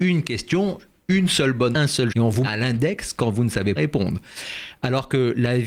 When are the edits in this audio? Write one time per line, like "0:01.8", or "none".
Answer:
0:01.7
0:02.1
0:02.4
0:03.8